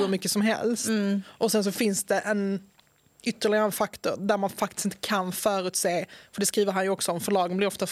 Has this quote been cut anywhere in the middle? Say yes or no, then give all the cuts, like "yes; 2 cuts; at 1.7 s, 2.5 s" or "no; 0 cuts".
no; 0 cuts